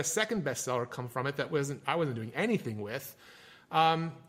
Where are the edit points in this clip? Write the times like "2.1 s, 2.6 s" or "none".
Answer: none